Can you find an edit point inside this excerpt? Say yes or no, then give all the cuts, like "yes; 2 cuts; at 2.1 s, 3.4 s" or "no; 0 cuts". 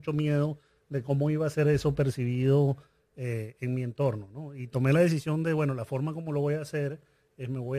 no; 0 cuts